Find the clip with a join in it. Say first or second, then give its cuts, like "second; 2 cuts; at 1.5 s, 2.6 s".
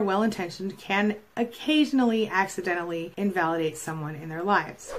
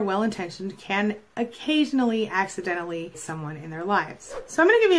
second; 1 cut; at 3.1 s